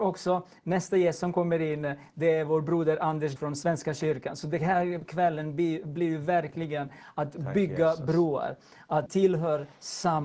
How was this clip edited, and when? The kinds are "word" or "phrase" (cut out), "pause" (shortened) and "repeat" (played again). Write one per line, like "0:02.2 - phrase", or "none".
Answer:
0:03.4 - word
0:09.1 - word